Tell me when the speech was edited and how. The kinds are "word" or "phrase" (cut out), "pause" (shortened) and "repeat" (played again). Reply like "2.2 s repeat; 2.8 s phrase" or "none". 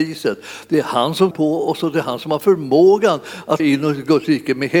1.3 s word; 3.6 s word